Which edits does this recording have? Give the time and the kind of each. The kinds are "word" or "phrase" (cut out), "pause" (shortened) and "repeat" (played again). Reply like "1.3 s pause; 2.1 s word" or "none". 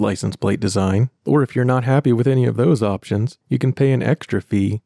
none